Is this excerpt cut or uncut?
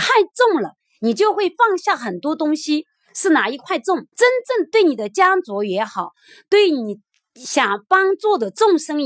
cut